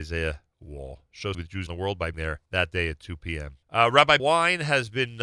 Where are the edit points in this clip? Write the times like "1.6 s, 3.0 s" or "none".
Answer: 1.3 s, 1.7 s, 2.1 s, 2.5 s, 3.6 s, 4.2 s

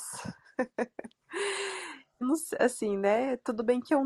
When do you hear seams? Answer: 2.2 s

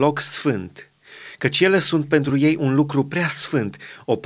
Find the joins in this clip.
none

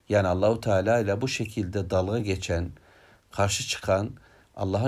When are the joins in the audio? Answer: none

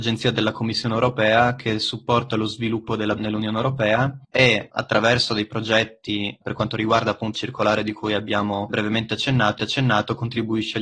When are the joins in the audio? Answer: 3.2 s, 7.3 s, 8.7 s, 9.6 s

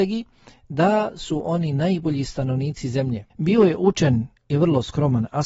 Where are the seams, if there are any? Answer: 3.3 s, 4.4 s

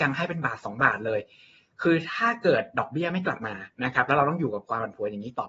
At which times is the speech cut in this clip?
none

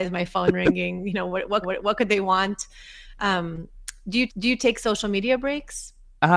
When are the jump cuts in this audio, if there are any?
1.6 s, 4.3 s

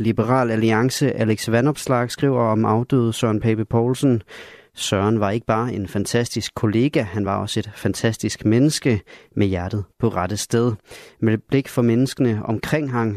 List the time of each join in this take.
none

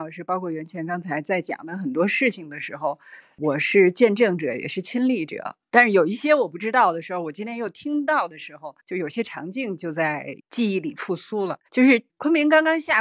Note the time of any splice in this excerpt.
8.8 s, 10.4 s, 11.7 s

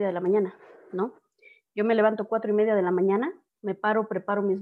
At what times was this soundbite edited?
none

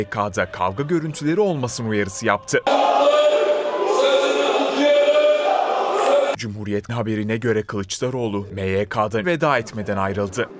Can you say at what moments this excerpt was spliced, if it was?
6.9 s, 9.2 s

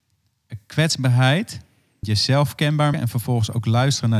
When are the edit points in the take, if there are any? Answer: 2.0 s, 2.9 s

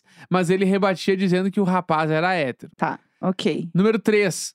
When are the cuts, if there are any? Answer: 2.7 s

